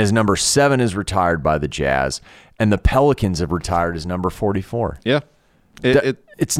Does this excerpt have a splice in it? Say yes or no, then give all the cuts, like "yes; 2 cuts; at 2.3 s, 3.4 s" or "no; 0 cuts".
no; 0 cuts